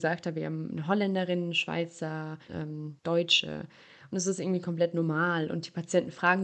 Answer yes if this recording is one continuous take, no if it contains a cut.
no